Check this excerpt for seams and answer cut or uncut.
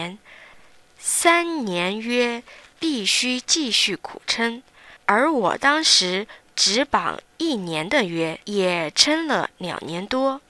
cut